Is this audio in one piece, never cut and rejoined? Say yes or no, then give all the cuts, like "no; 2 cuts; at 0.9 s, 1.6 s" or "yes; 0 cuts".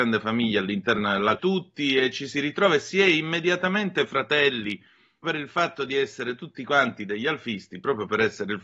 no; 2 cuts; at 1.4 s, 5.2 s